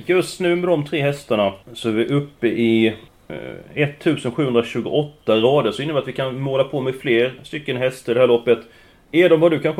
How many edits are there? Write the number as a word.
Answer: two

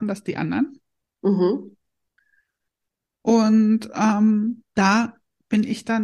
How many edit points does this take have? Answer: one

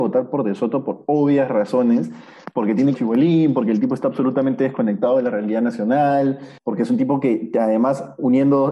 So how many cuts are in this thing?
two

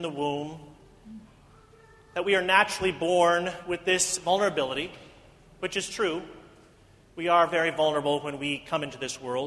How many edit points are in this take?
zero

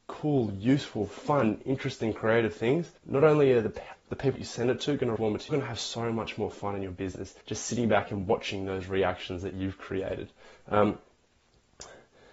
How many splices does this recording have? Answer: six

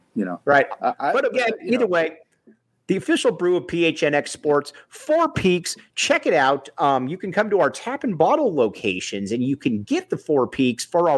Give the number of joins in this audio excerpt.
zero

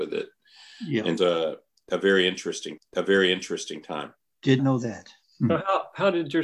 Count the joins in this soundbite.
three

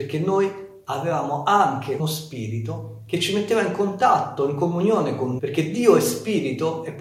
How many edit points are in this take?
two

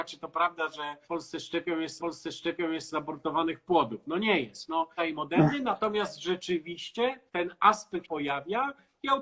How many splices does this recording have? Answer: five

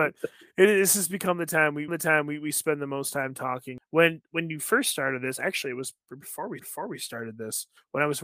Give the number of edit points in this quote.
two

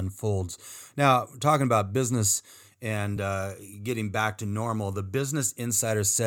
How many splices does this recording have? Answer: zero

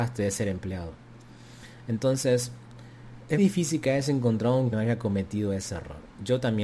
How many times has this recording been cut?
two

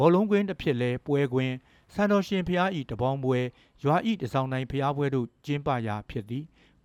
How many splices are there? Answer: zero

